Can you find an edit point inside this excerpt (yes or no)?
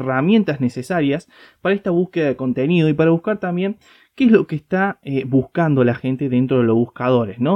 no